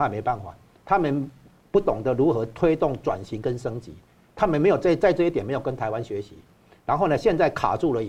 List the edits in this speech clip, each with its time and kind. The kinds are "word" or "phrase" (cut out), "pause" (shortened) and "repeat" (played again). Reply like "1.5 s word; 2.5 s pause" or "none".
none